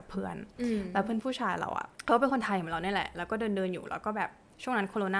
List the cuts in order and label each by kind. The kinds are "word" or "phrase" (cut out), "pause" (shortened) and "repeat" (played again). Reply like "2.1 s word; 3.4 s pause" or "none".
1.9 s pause